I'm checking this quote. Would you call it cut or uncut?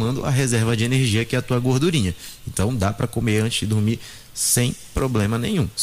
uncut